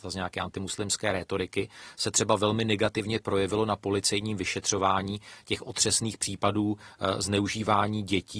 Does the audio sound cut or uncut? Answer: uncut